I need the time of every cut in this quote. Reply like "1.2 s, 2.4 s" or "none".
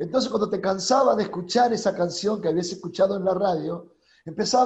none